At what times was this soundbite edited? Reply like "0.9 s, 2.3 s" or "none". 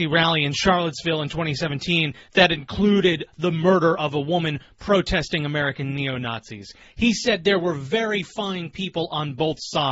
none